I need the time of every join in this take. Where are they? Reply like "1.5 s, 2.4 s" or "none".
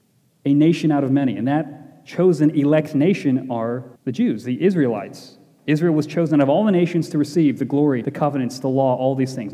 4.0 s, 8.0 s